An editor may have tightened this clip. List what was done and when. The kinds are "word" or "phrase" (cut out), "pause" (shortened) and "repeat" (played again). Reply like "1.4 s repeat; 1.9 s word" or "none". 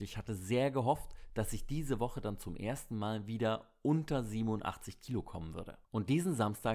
none